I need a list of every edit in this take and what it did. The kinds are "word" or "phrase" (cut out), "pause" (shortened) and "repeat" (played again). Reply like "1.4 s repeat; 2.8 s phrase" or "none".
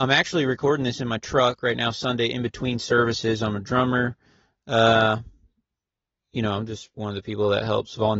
none